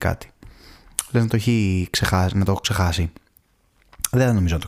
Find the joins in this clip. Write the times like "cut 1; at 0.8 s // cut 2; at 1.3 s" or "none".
none